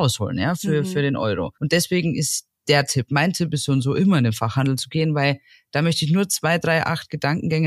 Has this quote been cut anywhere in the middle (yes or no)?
yes